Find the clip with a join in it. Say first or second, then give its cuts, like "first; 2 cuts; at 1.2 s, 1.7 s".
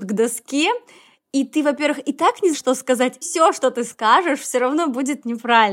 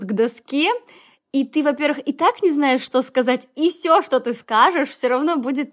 first; 2 cuts; at 2.5 s, 3.2 s